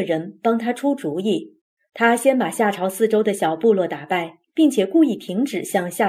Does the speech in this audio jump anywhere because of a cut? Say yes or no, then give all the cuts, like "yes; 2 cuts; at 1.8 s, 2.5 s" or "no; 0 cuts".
yes; 1 cut; at 1.7 s